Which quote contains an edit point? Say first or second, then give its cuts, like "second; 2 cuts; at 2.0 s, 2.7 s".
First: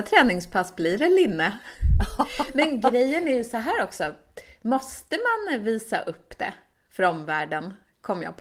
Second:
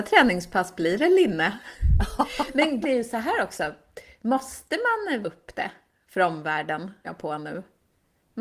second; 3 cuts; at 2.8 s, 5.2 s, 7.0 s